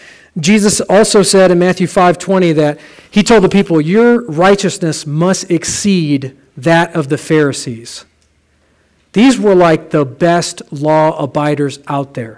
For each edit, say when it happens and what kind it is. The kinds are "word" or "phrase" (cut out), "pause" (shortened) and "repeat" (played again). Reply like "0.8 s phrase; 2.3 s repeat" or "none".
none